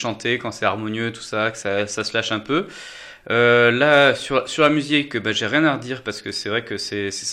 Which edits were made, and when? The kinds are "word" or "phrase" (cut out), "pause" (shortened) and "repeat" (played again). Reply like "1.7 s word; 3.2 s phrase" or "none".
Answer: none